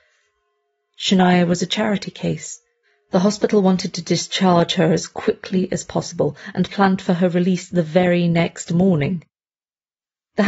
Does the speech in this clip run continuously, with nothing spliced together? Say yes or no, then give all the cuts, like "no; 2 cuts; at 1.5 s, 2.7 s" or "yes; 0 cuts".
yes; 0 cuts